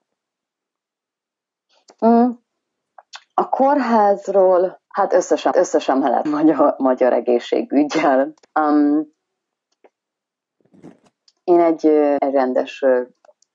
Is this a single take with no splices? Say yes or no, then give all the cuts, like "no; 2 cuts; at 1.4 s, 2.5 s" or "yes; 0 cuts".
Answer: no; 5 cuts; at 4.9 s, 5.5 s, 6.3 s, 8.4 s, 12.2 s